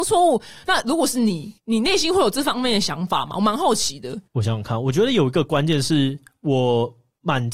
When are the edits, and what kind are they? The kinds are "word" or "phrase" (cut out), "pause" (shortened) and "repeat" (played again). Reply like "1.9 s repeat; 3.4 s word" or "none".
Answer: 1.6 s pause; 4.3 s pause